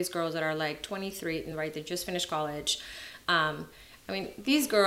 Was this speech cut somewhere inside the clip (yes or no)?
no